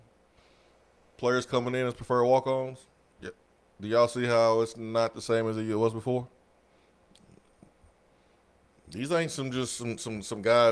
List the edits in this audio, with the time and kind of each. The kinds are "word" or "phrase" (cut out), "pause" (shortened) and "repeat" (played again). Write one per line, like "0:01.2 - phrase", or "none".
none